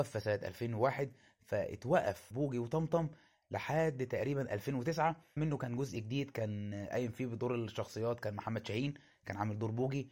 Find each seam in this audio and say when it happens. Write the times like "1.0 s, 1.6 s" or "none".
2.3 s, 5.4 s